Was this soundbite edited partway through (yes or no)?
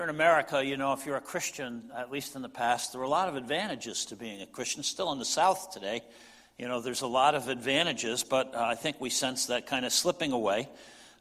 no